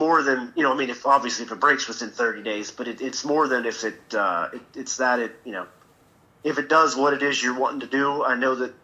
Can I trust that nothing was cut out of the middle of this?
yes; 0 cuts

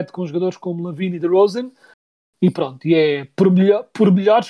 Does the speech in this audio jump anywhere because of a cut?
no; 0 cuts

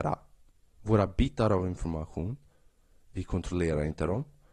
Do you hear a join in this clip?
no; 0 cuts

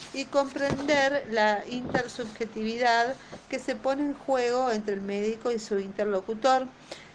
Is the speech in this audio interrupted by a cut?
no; 0 cuts

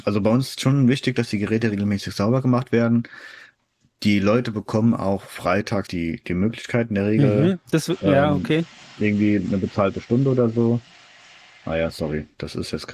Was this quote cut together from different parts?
yes; 1 cut; at 5.9 s

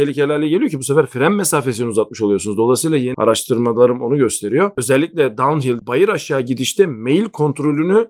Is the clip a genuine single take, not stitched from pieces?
no; 2 cuts; at 3.1 s, 5.8 s

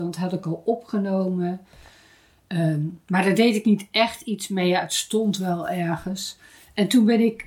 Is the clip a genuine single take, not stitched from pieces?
yes; 0 cuts

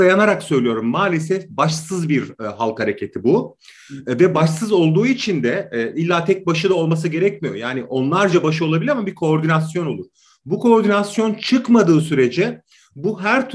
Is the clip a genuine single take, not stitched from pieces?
yes; 0 cuts

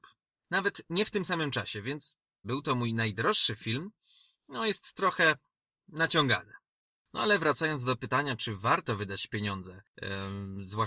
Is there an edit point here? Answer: yes; 1 cut; at 2.4 s

